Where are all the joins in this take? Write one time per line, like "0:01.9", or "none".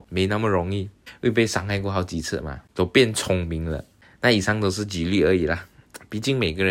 none